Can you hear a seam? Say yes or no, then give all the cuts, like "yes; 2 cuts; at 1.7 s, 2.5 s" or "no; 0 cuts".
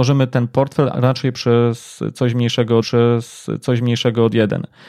yes; 2 cuts; at 0.9 s, 2.8 s